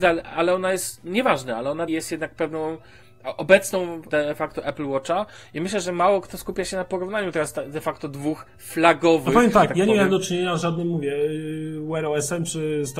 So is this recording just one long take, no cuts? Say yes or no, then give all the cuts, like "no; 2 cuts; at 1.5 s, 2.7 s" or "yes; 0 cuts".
no; 2 cuts; at 1.9 s, 4.1 s